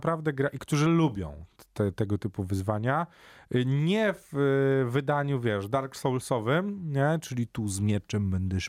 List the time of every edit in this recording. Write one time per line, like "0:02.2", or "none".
none